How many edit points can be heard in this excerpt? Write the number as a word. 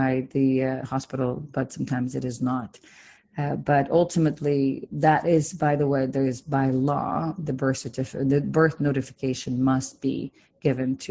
zero